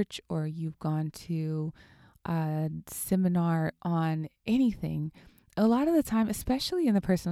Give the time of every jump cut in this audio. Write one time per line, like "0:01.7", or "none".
none